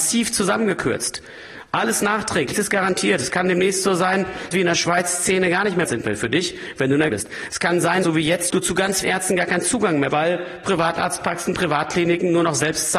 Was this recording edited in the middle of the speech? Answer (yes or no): yes